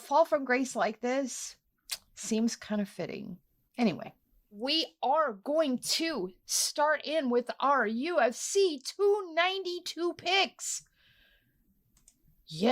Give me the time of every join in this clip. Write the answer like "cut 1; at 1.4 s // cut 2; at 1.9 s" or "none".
cut 1; at 3.5 s